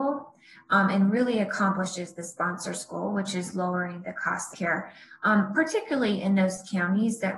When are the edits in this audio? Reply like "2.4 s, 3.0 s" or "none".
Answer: 4.5 s

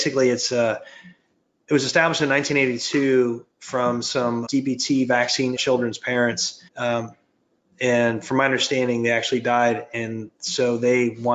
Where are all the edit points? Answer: 4.5 s, 5.6 s, 6.7 s

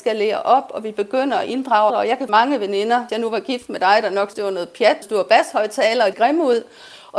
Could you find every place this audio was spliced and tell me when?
1.9 s, 2.3 s, 3.1 s, 4.3 s, 5.0 s, 6.1 s

